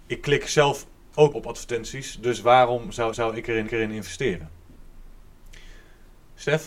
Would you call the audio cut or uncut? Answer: cut